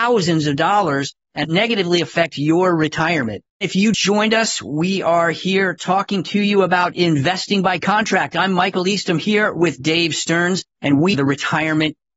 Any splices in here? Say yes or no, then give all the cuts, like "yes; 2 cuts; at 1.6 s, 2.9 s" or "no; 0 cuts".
yes; 4 cuts; at 3.5 s, 3.9 s, 10.7 s, 11.1 s